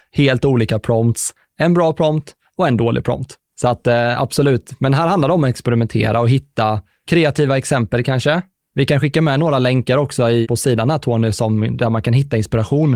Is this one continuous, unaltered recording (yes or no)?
yes